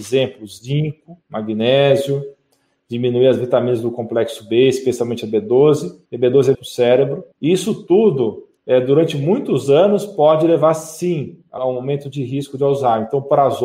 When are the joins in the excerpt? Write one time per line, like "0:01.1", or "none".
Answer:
0:01.2
0:06.1
0:06.5
0:07.3
0:08.6
0:11.6